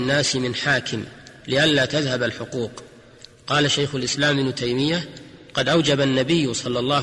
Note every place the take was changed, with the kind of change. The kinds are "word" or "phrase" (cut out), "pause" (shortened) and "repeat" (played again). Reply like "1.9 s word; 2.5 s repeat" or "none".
none

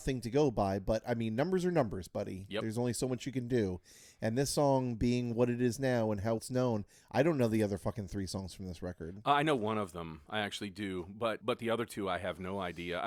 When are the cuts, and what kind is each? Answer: 6.4 s word; 11.4 s word

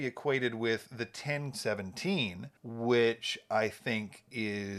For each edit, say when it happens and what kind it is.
1.5 s phrase; 2.6 s pause

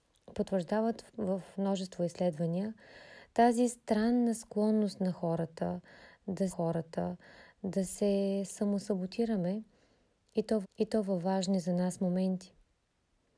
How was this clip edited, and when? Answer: 6.5 s repeat; 10.6 s repeat

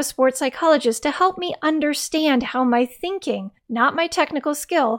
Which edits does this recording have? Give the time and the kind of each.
3.6 s pause

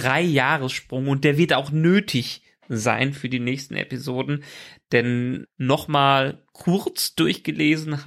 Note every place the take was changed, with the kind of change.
5.4 s phrase

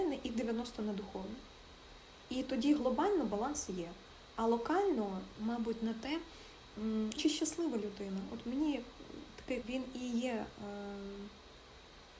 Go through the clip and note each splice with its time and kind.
5.3 s phrase; 7.2 s word; 9.6 s phrase

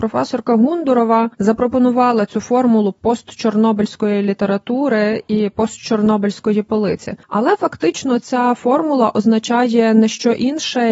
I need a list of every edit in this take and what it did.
1.3 s pause; 7.2 s pause

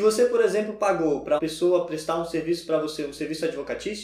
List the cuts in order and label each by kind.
1.4 s word

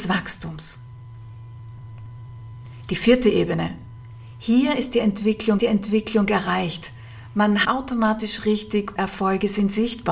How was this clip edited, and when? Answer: 5.6 s repeat; 7.6 s word; 9.0 s word

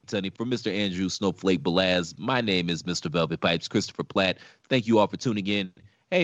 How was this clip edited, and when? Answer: none

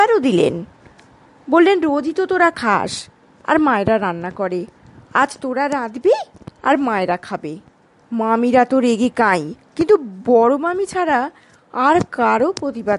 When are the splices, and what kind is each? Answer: none

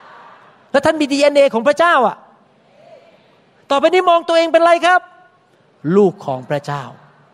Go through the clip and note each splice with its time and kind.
none

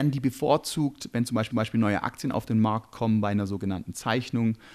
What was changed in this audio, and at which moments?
1.5 s repeat

